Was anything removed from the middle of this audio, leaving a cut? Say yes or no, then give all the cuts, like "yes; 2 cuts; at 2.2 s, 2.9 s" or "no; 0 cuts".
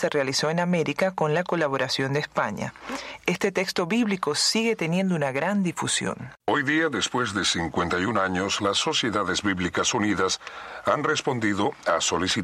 yes; 1 cut; at 6.4 s